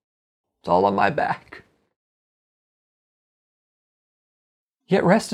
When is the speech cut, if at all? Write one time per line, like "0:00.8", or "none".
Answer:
none